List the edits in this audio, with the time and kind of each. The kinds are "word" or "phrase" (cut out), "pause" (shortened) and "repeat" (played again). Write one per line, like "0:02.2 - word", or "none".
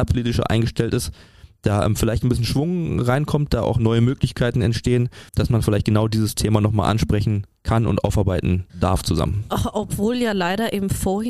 0:05.3 - pause
0:08.7 - pause